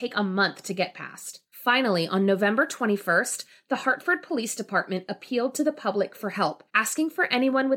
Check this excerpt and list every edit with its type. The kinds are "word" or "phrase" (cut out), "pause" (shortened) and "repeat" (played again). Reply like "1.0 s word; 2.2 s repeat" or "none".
1.5 s pause; 6.7 s pause